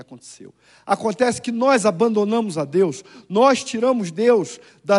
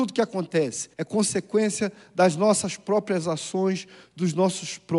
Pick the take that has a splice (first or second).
second